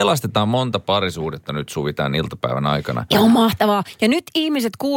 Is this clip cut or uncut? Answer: uncut